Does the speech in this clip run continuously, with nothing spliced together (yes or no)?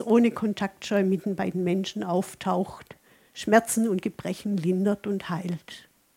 yes